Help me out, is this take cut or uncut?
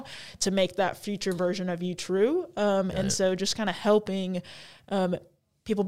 uncut